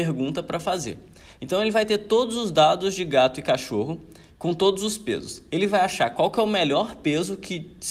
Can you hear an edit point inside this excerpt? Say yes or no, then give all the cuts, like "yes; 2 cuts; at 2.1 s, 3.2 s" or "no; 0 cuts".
no; 0 cuts